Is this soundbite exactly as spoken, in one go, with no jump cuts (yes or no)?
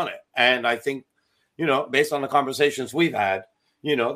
yes